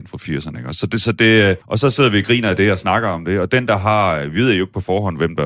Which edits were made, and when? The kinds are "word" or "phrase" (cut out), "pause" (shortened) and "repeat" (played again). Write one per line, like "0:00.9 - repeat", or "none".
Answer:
0:01.6 - pause